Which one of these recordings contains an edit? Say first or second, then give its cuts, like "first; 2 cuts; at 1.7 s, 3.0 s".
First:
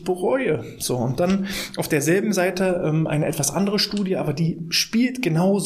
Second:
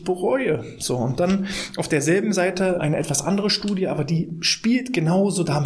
second; 1 cut; at 2.8 s